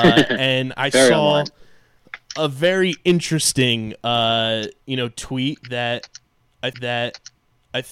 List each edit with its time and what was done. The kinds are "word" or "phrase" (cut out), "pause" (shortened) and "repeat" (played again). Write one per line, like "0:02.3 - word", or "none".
0:06.7 - repeat